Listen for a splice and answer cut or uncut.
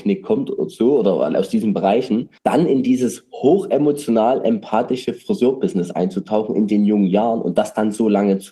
cut